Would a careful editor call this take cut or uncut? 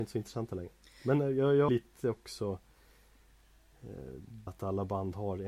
cut